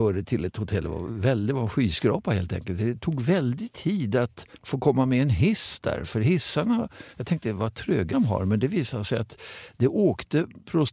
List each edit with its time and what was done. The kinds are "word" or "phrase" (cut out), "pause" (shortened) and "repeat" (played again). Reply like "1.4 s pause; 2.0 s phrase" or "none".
4.5 s pause; 7.1 s pause; 8.1 s word